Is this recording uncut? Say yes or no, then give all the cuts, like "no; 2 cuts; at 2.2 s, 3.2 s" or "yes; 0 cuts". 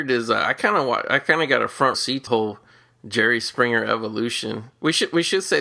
no; 2 cuts; at 1.9 s, 2.3 s